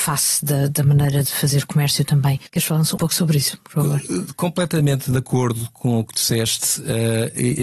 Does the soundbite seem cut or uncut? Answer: cut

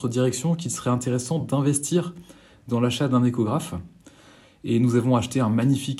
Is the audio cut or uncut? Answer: uncut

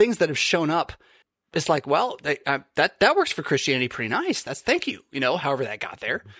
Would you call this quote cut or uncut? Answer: cut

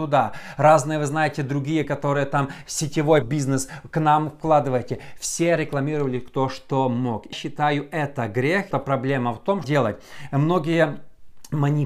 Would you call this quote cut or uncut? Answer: cut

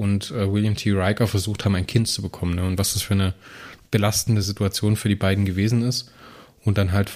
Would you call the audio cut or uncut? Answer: uncut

